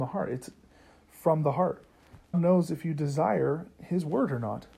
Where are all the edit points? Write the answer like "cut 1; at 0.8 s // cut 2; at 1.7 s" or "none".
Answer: cut 1; at 2.3 s